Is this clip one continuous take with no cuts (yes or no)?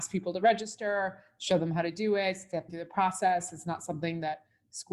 no